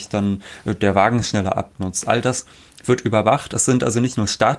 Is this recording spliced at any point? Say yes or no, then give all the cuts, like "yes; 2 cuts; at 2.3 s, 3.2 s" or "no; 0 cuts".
no; 0 cuts